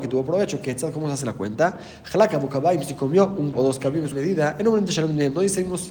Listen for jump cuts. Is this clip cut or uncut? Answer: cut